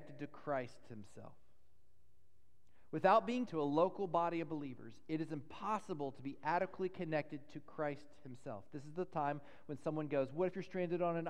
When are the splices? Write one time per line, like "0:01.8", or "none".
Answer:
0:03.5